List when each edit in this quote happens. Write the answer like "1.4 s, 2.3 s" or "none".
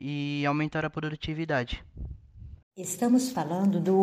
2.6 s